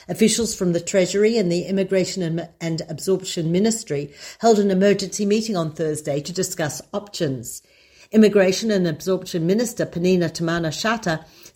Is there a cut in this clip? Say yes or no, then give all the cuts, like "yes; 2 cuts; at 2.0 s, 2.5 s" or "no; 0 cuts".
no; 0 cuts